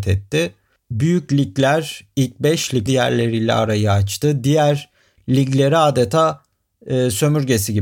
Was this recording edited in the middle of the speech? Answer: yes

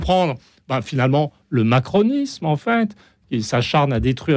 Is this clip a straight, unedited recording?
yes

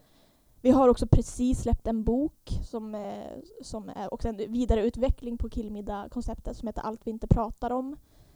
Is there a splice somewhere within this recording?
no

